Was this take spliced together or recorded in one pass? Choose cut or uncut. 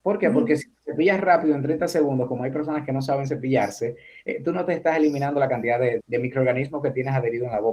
cut